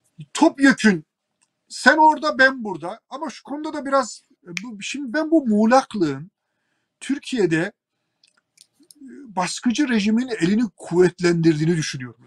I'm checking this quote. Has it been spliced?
no; 0 cuts

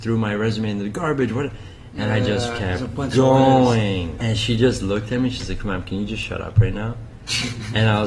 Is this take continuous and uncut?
no; 1 cut; at 4.2 s

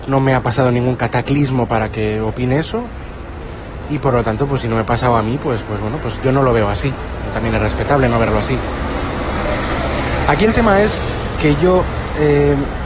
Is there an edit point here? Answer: no; 0 cuts

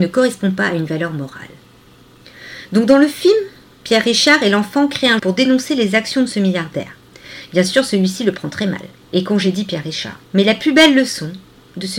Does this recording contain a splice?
yes; 3 cuts; at 5.2 s, 9.0 s, 10.3 s

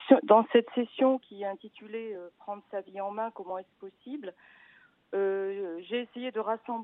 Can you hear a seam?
no; 0 cuts

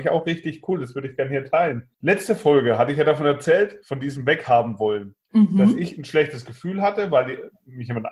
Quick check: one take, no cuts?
no; 2 cuts; at 1.9 s, 5.2 s

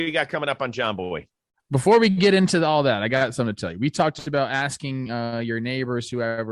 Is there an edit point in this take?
no; 0 cuts

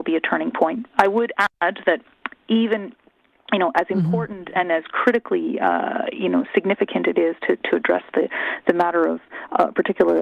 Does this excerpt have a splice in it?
no; 0 cuts

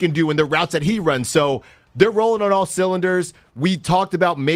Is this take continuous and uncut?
yes; 0 cuts

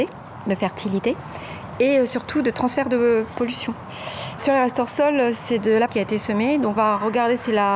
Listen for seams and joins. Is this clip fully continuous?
no; 2 cuts; at 5.9 s, 6.8 s

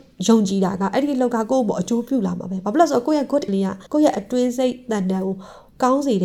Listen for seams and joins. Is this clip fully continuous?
no; 2 cuts; at 3.5 s, 3.9 s

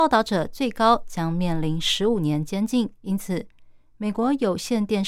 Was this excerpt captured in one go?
no; 1 cut; at 3.0 s

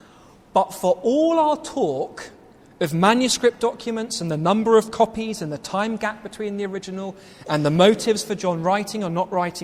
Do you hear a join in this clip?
no; 0 cuts

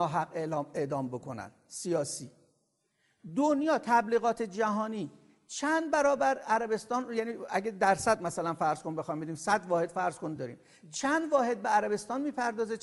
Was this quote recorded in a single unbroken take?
yes; 0 cuts

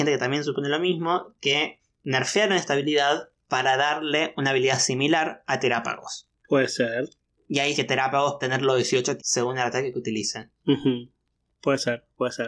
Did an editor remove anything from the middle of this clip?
yes; 6 cuts; at 6.4 s, 7.2 s, 7.7 s, 8.4 s, 9.2 s, 10.6 s

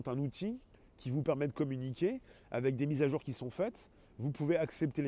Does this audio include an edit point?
no; 0 cuts

